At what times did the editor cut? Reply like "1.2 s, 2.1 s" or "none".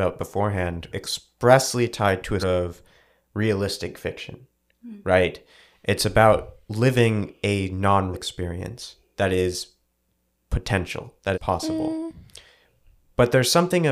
0.9 s, 2.4 s, 8.1 s, 11.3 s